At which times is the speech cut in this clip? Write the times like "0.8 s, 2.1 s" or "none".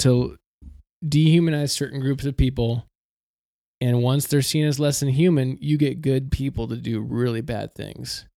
none